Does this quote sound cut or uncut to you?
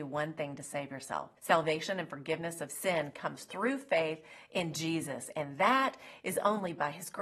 cut